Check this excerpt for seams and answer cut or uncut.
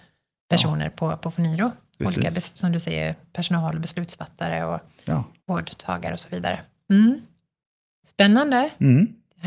uncut